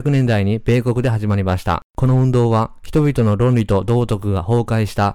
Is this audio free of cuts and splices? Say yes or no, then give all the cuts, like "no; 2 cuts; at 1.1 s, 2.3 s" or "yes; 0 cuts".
no; 1 cut; at 1.9 s